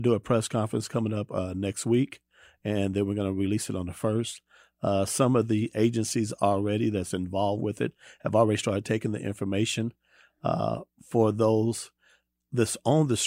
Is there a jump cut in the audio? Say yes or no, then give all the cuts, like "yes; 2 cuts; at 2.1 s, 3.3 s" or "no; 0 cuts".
no; 0 cuts